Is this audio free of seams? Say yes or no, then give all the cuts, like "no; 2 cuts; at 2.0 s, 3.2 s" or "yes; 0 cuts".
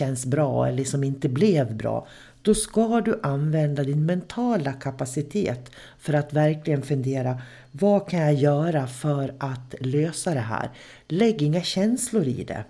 yes; 0 cuts